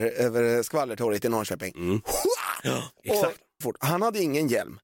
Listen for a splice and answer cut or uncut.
cut